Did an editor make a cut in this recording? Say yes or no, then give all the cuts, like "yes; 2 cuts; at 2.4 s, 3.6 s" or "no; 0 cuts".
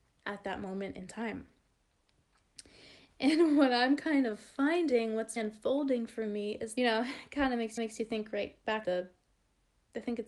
yes; 4 cuts; at 5.4 s, 6.8 s, 7.8 s, 8.8 s